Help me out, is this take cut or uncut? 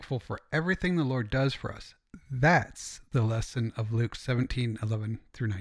uncut